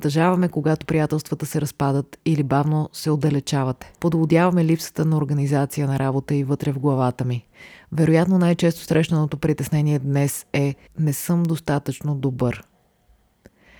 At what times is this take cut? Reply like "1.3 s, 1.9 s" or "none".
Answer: 4.0 s, 10.9 s